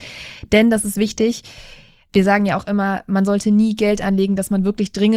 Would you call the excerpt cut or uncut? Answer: uncut